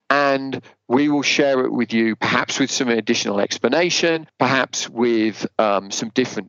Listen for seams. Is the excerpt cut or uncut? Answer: uncut